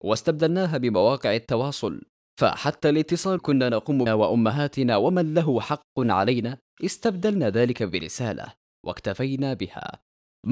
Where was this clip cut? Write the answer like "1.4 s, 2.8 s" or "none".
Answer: 3.4 s, 4.1 s